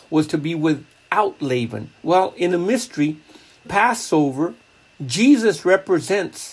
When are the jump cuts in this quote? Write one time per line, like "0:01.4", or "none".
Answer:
0:02.0
0:02.5
0:03.6

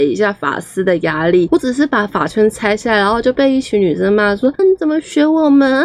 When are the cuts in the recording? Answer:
0:04.6

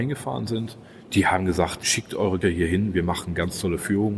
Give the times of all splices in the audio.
0:01.8
0:02.4

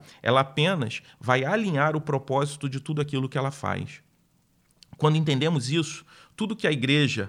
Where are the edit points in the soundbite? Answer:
none

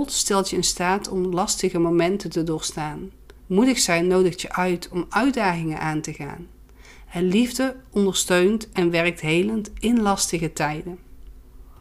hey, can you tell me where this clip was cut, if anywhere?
0:03.4

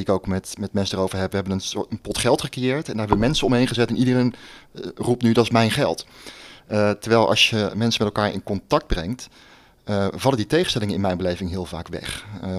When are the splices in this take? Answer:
none

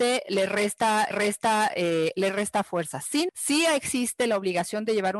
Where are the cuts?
0:01.1
0:03.3

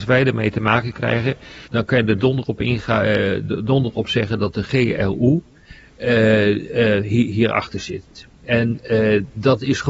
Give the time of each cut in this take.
0:01.7

